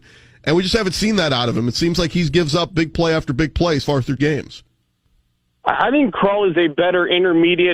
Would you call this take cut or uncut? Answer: cut